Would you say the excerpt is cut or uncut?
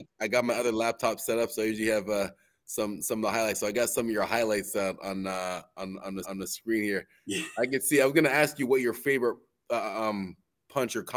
cut